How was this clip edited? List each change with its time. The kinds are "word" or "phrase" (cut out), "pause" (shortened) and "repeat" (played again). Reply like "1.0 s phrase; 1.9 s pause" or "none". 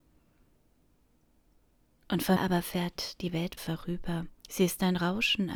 2.4 s word; 3.6 s word; 4.4 s pause